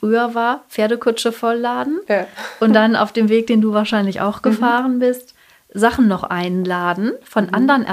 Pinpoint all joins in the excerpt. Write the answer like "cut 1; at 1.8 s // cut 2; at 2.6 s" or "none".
none